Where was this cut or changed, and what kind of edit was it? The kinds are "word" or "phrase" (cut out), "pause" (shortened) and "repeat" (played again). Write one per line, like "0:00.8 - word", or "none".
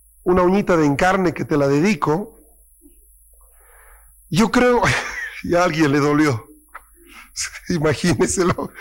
none